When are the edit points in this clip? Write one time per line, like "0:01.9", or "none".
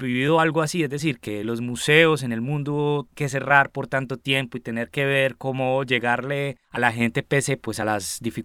0:03.1
0:06.6